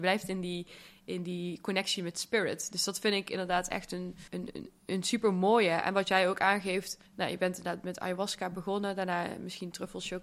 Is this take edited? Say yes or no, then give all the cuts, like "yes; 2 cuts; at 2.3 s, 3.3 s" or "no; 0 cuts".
yes; 2 cuts; at 4.3 s, 7.1 s